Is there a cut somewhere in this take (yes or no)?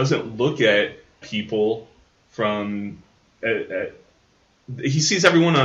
yes